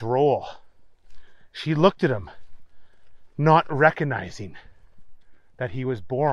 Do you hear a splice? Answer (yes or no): no